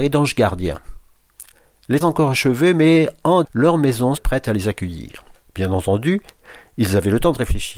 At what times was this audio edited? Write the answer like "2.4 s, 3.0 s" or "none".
2.0 s, 3.4 s, 4.2 s, 5.3 s